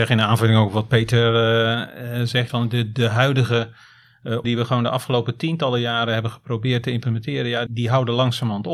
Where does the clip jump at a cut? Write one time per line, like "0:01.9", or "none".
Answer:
0:02.5
0:04.4
0:07.7